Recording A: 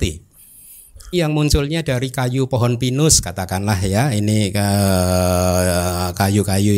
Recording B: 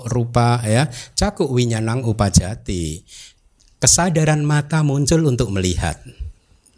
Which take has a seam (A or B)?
A